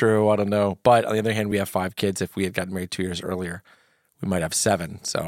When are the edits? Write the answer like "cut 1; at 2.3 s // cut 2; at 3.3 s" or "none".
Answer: none